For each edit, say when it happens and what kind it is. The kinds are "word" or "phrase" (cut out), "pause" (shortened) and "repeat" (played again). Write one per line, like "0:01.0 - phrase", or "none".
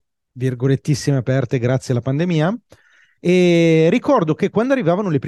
none

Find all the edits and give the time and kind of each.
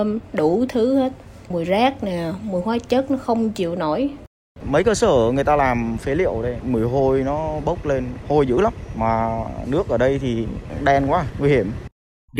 none

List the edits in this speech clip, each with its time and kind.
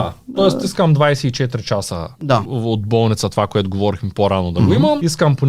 0:02.1 - pause

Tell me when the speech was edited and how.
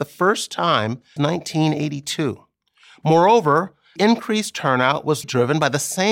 0:01.2 - word
0:04.0 - word
0:05.2 - word

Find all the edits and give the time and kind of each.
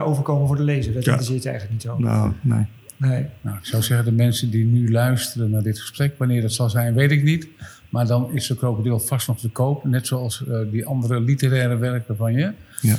none

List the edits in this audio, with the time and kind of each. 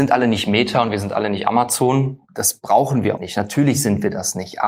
0:03.2 - word

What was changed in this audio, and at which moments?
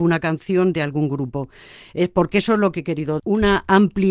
0:03.2 - word

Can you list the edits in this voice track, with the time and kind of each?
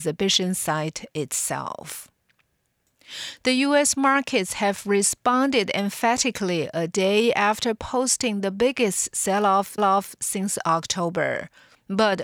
0:09.8 - repeat

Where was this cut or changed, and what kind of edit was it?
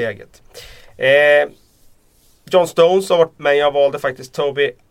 0:03.3 - word

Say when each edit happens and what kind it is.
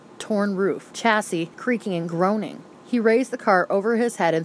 0:00.9 - word
0:01.5 - pause
0:02.7 - pause

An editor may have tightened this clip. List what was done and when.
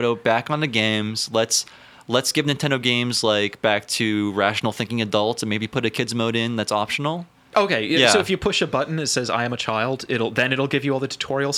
none

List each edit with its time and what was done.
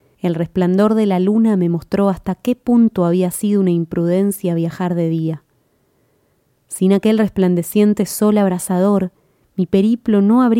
none

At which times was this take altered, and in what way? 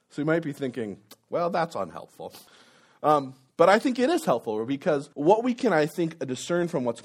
0:02.5 - pause
0:05.1 - pause

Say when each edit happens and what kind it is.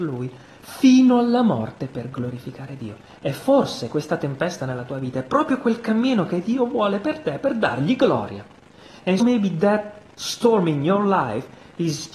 0:03.1 - pause
0:09.2 - word

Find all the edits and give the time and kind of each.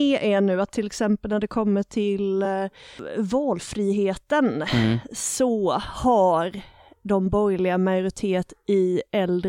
none

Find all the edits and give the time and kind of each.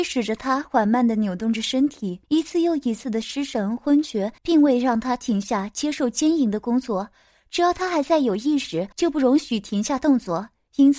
0:02.2 - pause
0:04.4 - pause
0:08.9 - pause

